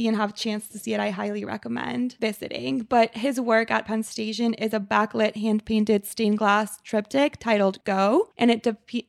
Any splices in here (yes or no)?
no